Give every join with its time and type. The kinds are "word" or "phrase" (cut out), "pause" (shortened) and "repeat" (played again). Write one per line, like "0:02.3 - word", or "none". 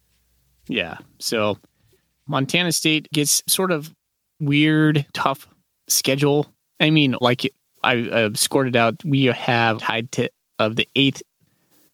0:02.3 - word
0:03.1 - word
0:03.5 - word
0:04.4 - word
0:05.1 - word
0:07.2 - word
0:07.8 - word
0:09.8 - word

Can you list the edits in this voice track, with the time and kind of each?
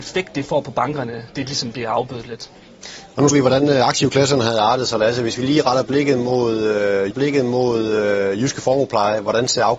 0:03.3 - word
0:07.1 - repeat

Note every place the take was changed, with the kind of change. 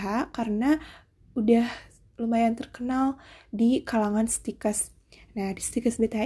none

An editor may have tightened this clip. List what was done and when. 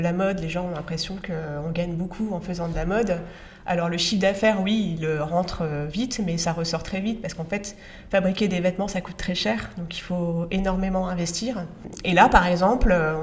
none

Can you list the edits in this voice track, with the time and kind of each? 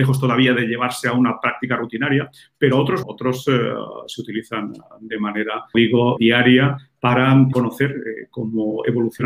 0:03.0 - word
0:05.7 - word
0:06.2 - word
0:07.5 - word

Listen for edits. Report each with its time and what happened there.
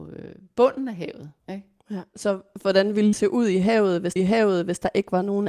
0:01.4 - pause
0:03.1 - word
0:04.2 - repeat

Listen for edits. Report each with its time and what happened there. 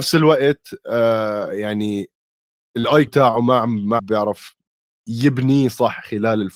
0:03.1 - word
0:04.0 - word

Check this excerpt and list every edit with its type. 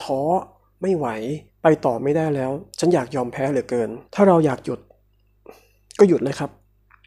0:01.5 - pause
0:02.7 - pause
0:04.1 - pause

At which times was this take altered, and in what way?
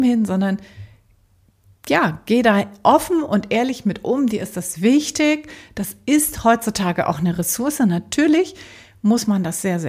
none

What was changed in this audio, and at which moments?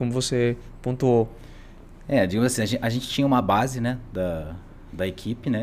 none

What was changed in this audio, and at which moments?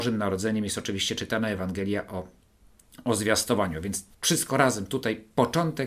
0:04.1 - pause

